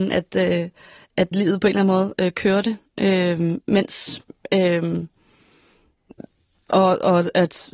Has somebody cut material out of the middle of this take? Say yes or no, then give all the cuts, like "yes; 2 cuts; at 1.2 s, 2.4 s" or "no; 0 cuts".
yes; 1 cut; at 1.3 s